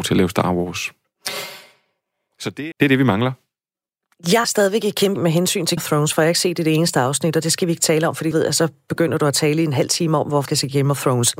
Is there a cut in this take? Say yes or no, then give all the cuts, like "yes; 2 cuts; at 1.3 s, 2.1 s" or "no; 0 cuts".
yes; 6 cuts; at 2.7 s, 4.4 s, 5.2 s, 5.8 s, 8.3 s, 10.5 s